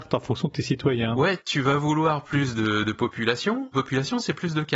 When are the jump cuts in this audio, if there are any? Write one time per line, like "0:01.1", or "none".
0:03.7